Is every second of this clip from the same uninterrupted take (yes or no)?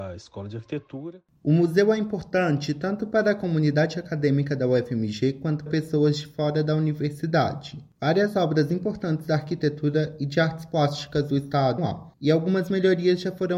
no